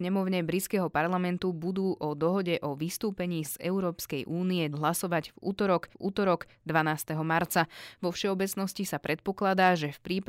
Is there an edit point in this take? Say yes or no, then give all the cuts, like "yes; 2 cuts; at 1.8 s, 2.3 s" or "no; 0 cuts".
yes; 3 cuts; at 3.4 s, 4.7 s, 5.9 s